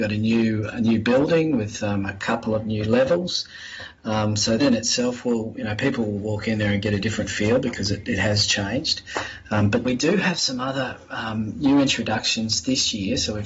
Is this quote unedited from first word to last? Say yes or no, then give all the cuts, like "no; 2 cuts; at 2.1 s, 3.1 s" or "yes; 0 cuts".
no; 2 cuts; at 4.6 s, 9.8 s